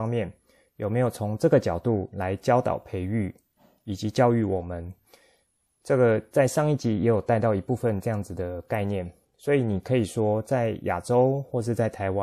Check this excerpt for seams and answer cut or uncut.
uncut